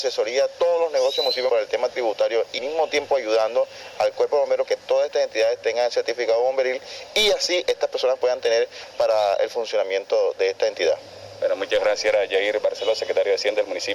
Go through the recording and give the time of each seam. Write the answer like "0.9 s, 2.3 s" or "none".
1.5 s, 2.6 s, 4.6 s